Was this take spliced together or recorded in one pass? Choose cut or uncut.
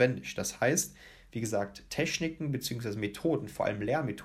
uncut